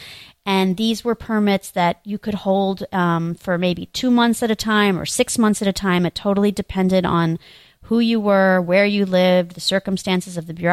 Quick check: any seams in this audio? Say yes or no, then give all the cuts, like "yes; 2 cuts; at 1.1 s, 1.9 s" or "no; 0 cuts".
no; 0 cuts